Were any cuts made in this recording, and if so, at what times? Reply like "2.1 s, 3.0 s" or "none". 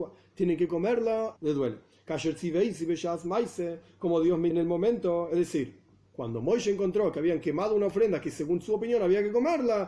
1.4 s, 4.5 s